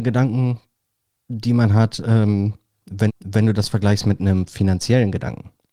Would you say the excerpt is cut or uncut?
cut